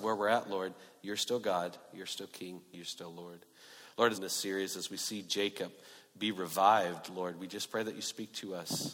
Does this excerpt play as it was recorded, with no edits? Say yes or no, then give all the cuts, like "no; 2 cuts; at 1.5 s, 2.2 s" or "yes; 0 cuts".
no; 1 cut; at 4.1 s